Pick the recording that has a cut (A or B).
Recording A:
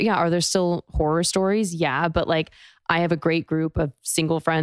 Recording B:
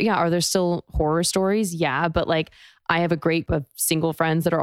B